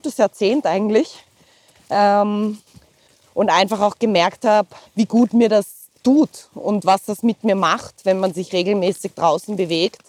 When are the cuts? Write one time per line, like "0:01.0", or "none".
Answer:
0:04.8
0:06.0